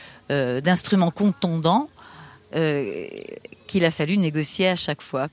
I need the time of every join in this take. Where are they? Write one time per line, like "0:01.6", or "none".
none